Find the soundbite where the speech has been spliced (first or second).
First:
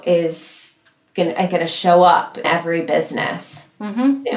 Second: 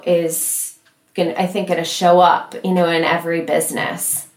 first